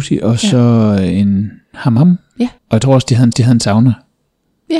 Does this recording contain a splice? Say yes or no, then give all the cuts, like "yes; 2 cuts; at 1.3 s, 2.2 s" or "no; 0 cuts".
yes; 2 cuts; at 2.6 s, 3.3 s